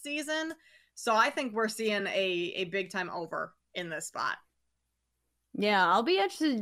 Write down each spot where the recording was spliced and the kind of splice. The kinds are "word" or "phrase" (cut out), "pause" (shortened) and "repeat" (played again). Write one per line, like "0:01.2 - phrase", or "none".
none